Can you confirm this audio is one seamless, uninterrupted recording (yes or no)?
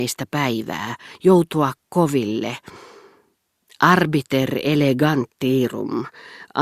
yes